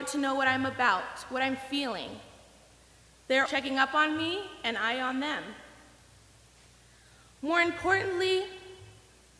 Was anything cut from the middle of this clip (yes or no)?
yes